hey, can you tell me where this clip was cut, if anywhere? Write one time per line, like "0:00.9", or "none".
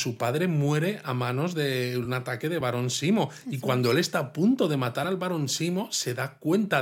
none